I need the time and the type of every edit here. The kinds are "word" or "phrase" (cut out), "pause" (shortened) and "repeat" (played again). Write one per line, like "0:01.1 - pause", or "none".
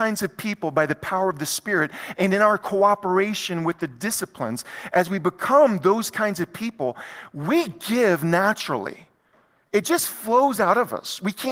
none